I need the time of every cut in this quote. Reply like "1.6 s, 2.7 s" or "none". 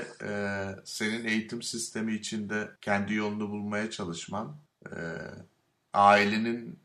2.8 s, 4.7 s